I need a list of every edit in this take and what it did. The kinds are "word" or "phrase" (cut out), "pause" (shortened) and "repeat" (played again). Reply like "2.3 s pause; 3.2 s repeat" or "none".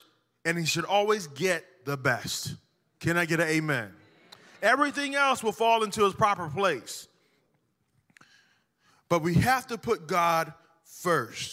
none